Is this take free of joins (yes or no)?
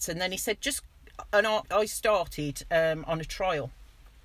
no